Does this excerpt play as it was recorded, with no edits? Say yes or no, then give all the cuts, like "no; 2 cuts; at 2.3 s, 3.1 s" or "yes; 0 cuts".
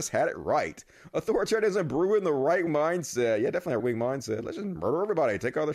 no; 2 cuts; at 2.7 s, 3.8 s